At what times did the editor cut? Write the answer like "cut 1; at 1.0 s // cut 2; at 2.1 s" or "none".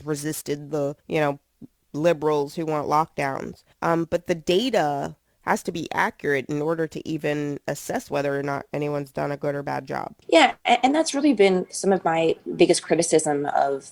cut 1; at 1.0 s // cut 2; at 3.7 s // cut 3; at 10.2 s